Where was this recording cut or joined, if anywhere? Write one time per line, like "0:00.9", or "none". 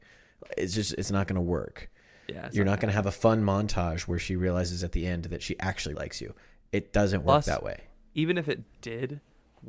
0:05.9